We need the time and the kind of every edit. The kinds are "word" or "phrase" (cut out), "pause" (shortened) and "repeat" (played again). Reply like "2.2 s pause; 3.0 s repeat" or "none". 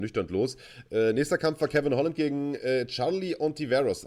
none